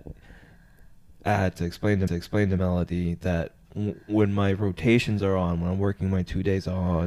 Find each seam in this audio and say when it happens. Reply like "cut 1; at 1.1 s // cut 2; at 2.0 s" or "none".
cut 1; at 2.1 s

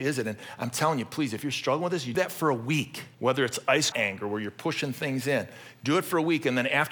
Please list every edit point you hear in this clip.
cut 1; at 2.1 s // cut 2; at 3.1 s // cut 3; at 3.9 s

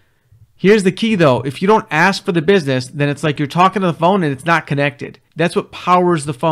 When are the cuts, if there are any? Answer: cut 1; at 5.3 s

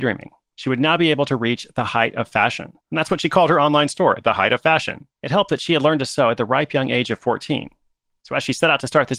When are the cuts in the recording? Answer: cut 1; at 2.8 s // cut 2; at 5.1 s

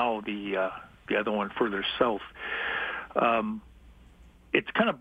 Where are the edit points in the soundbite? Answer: none

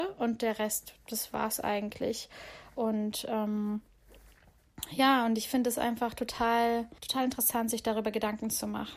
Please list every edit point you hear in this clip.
cut 1; at 7.0 s

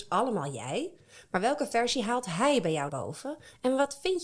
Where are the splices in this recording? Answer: cut 1; at 2.9 s

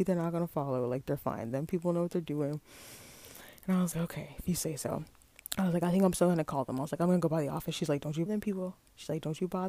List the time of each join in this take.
cut 1; at 3.9 s // cut 2; at 8.3 s

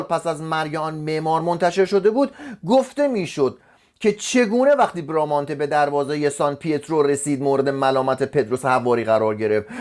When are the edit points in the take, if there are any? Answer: none

